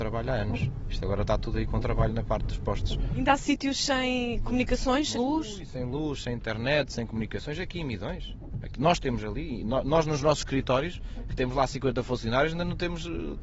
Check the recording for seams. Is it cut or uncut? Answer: cut